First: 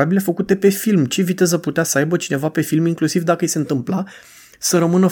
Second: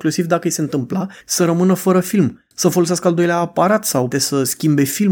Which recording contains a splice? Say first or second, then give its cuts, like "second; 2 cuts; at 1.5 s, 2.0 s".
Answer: second; 3 cuts; at 1.2 s, 2.5 s, 4.1 s